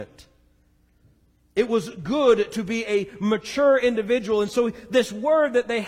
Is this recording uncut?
yes; 0 cuts

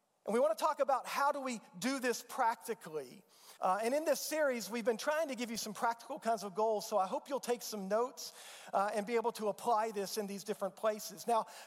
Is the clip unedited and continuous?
no; 1 cut; at 3.6 s

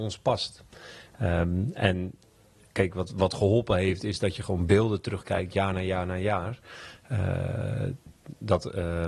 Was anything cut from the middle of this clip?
no; 0 cuts

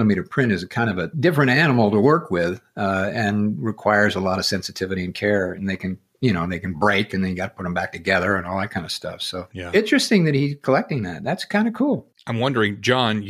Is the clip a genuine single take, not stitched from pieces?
yes; 0 cuts

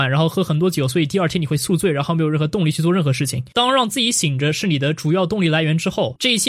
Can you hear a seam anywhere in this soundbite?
no; 0 cuts

